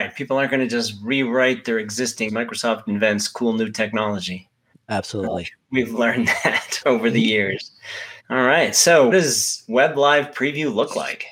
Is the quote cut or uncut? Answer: cut